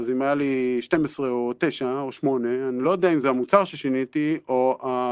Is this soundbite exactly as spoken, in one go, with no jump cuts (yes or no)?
yes